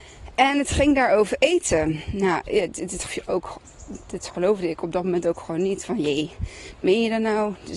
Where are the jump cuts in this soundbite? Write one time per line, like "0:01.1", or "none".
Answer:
0:03.1

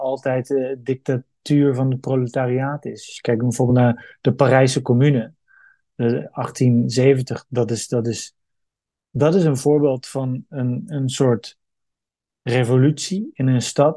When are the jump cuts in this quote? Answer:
none

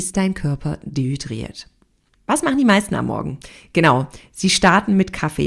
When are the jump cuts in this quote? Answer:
none

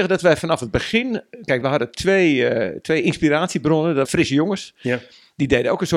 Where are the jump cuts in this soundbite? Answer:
0:01.6
0:04.1

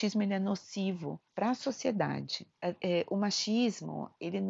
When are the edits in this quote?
0:01.3
0:02.5

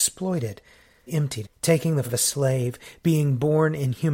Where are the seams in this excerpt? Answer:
0:01.1
0:01.4
0:02.0

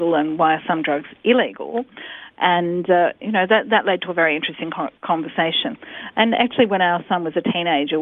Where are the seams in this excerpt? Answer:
0:05.0

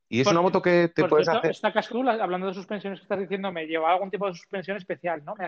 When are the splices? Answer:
0:01.9

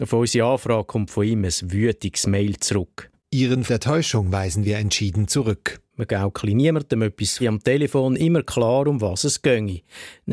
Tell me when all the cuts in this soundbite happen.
0:03.7
0:07.4

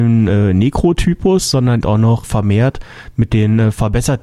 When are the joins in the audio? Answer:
0:01.8
0:02.2

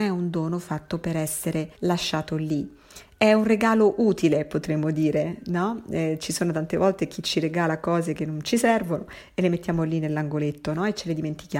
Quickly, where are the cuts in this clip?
0:01.8

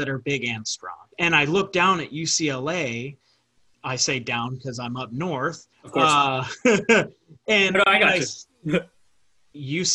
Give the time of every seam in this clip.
0:01.1
0:05.7

